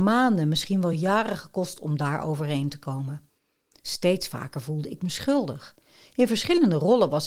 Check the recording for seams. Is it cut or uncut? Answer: uncut